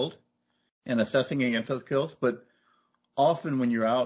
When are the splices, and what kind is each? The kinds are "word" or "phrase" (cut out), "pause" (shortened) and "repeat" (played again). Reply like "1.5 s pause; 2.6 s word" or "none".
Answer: none